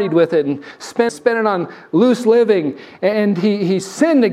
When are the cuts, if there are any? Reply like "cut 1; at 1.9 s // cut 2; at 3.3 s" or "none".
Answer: cut 1; at 1.1 s // cut 2; at 3.1 s